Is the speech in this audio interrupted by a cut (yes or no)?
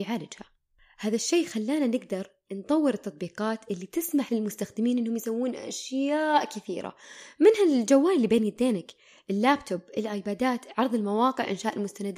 no